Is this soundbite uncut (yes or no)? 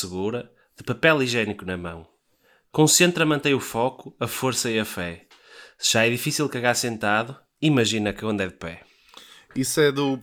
yes